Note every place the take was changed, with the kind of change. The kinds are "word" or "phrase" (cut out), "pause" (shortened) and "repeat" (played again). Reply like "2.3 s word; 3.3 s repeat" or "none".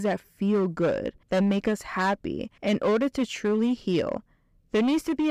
1.2 s pause; 2.6 s pause